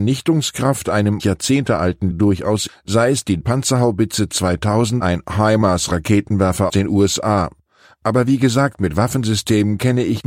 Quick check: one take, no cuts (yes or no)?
no